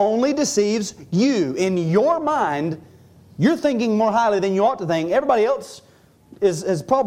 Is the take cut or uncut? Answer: uncut